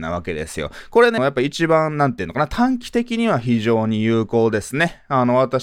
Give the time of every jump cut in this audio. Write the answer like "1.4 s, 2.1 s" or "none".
1.2 s